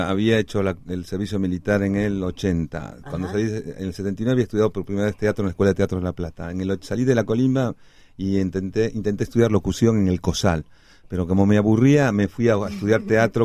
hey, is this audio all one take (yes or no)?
yes